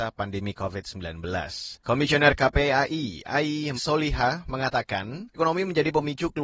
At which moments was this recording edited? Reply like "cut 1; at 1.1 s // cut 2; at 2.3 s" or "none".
cut 1; at 1.8 s // cut 2; at 3.7 s // cut 3; at 5.3 s